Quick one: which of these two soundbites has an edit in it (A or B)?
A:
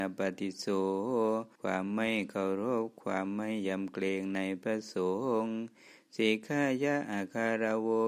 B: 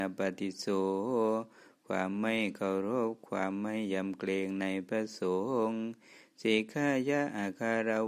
A